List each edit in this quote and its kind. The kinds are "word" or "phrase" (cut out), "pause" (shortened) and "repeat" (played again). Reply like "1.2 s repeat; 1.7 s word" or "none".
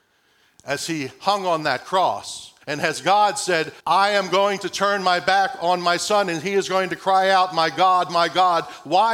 2.6 s pause; 3.8 s pause